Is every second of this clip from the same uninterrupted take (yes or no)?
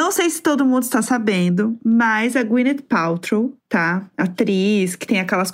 no